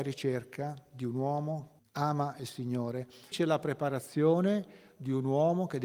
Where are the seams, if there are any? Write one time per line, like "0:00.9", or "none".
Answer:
0:01.8
0:03.3